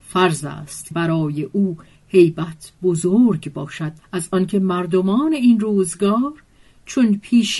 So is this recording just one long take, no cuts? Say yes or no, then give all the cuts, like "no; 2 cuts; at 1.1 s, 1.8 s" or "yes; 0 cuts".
no; 3 cuts; at 0.9 s, 2.0 s, 4.0 s